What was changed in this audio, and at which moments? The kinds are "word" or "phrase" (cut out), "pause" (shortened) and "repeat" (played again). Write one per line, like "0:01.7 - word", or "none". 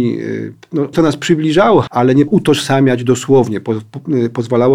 0:00.9 - word
0:01.9 - word
0:02.3 - word